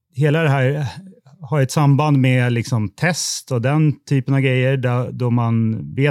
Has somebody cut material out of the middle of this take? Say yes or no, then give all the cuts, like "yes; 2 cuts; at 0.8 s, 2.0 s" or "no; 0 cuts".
no; 0 cuts